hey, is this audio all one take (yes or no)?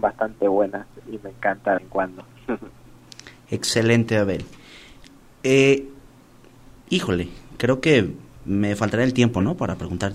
no